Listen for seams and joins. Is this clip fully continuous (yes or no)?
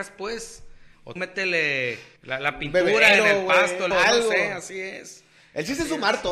no